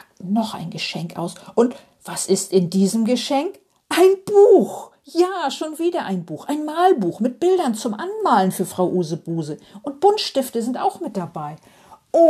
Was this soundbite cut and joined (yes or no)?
no